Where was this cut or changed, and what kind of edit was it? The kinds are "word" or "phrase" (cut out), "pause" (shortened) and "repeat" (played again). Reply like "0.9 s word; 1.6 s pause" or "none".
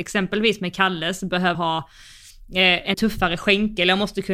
1.5 s word; 2.9 s word